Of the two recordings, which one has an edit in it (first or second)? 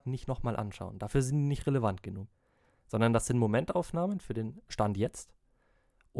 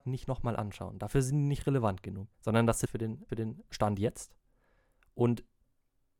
second